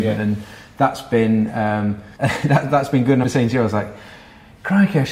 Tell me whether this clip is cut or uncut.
cut